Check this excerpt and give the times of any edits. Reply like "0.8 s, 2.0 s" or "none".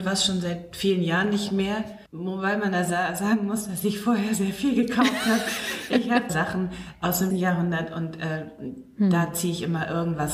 2.1 s, 6.3 s, 7.3 s